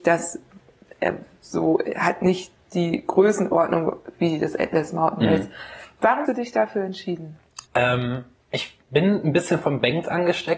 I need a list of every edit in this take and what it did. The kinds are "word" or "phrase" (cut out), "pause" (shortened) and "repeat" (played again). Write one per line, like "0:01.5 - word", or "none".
0:06.3 - word
0:07.7 - pause
0:08.8 - pause